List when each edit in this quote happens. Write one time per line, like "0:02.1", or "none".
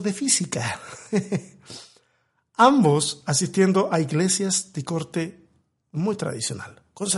none